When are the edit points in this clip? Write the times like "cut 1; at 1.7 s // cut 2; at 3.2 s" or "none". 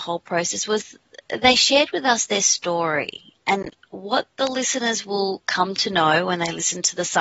none